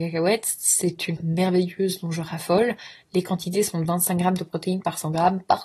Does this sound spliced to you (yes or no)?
yes